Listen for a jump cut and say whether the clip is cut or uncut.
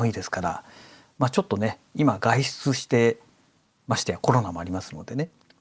uncut